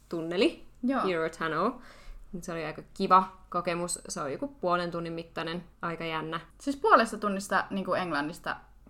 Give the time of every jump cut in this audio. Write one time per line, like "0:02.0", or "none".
0:05.7
0:06.5